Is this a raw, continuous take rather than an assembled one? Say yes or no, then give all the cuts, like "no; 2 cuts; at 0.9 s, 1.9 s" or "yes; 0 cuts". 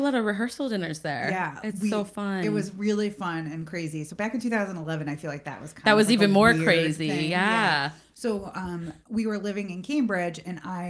yes; 0 cuts